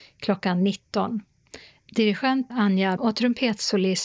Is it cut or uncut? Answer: cut